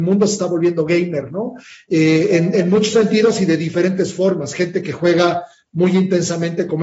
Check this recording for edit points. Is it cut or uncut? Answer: uncut